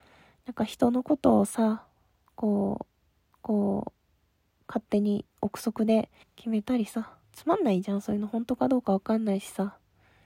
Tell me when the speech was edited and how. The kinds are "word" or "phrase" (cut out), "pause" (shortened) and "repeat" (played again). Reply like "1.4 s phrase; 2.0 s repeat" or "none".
3.3 s repeat; 6.2 s pause; 7.2 s pause